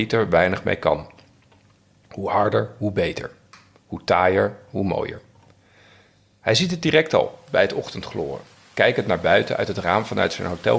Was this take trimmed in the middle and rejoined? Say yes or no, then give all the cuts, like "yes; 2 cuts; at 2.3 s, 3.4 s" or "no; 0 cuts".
no; 0 cuts